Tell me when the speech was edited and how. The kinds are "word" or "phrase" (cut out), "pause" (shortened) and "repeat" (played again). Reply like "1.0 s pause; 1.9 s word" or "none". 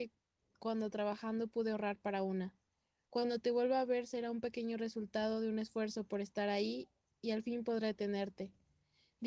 none